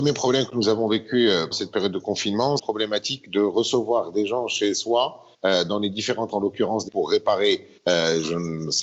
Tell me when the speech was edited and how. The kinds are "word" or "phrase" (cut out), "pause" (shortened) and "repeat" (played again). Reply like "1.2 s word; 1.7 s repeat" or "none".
1.5 s word; 2.6 s phrase; 5.3 s pause; 6.3 s word; 6.9 s phrase; 7.8 s pause